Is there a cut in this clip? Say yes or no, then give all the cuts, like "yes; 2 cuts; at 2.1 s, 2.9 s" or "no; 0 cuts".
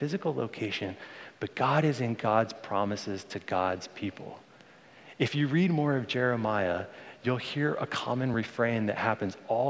no; 0 cuts